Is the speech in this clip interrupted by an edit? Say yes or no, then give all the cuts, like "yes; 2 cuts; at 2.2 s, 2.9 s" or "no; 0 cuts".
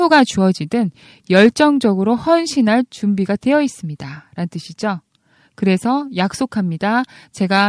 no; 0 cuts